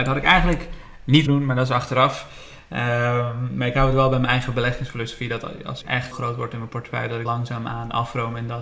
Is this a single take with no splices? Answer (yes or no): no